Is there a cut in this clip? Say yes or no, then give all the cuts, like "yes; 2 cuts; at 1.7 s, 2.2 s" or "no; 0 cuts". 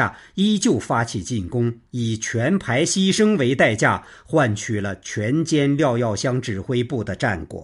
yes; 1 cut; at 1.8 s